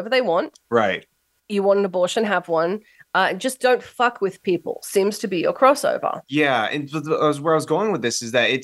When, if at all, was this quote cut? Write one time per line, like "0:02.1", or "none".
none